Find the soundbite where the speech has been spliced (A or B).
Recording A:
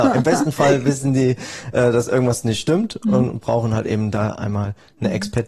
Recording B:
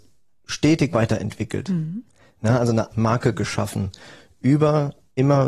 B